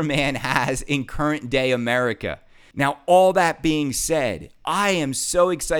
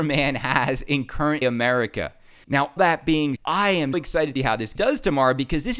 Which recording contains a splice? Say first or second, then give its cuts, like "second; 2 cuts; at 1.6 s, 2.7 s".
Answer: second; 6 cuts; at 1.4 s, 2.8 s, 3.4 s, 3.9 s, 4.4 s, 4.8 s